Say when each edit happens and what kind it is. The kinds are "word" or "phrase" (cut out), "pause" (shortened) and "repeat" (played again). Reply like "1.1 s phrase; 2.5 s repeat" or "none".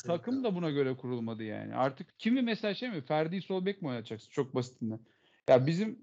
2.1 s pause